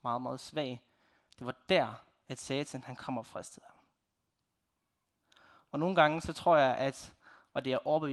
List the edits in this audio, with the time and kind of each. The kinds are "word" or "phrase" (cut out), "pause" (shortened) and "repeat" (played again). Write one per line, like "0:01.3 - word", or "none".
none